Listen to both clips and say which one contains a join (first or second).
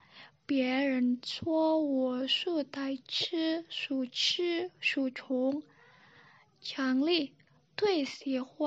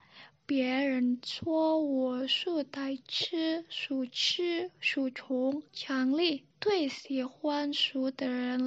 second